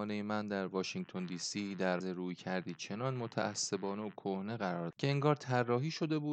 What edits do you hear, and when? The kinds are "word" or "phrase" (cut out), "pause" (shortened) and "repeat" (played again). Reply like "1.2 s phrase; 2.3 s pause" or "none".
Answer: 2.0 s word; 4.9 s word